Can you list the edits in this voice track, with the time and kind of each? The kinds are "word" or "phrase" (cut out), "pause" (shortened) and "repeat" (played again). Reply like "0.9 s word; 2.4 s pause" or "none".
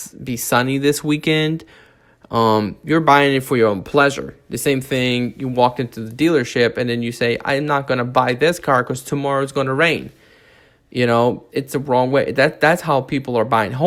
11.5 s word